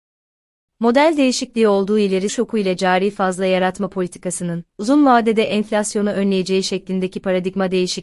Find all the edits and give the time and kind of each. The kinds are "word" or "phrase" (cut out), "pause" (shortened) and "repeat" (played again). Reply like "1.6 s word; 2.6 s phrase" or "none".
2.3 s phrase; 4.7 s pause

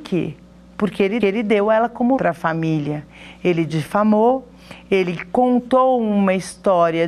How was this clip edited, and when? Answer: 1.2 s repeat; 2.2 s word

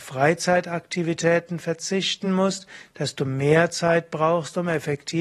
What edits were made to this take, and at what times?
none

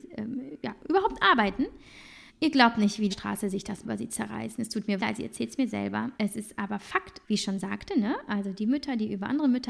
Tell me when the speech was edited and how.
2.3 s pause; 3.1 s phrase; 3.8 s word; 5.0 s word; 6.2 s pause; 7.2 s word

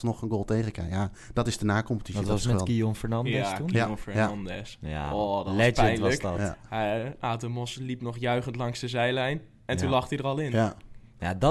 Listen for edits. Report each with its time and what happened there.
none

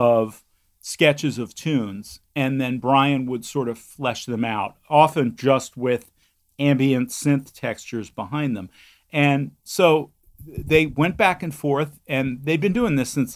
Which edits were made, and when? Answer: none

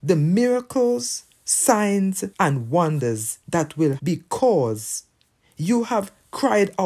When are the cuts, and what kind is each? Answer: 2.3 s pause; 3.4 s pause; 4.0 s word

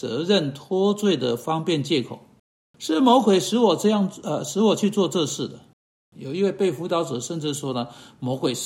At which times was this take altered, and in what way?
none

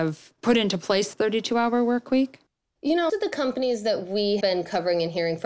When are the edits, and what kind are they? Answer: 1.1 s word; 3.1 s word; 4.4 s word

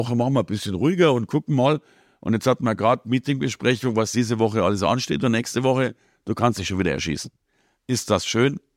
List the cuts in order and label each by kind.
none

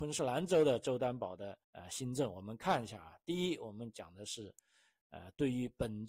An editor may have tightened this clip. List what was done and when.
1.6 s pause

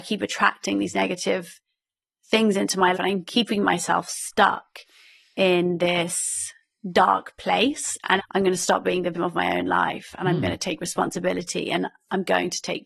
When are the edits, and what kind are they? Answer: 2.9 s word; 8.2 s word; 9.1 s word

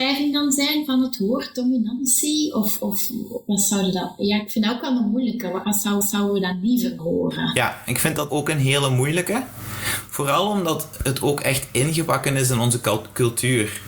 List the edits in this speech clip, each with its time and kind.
5.6 s word; 6.0 s repeat; 7.0 s word; 8.3 s word

